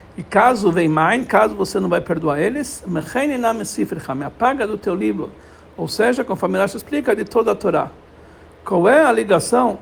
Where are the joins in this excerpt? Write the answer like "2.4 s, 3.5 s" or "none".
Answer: none